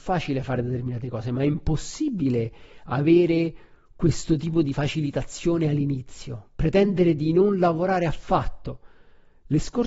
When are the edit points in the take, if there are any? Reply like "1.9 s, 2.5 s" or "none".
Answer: none